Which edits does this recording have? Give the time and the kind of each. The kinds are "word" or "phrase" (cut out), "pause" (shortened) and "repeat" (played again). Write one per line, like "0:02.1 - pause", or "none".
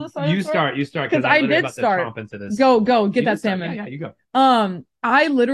none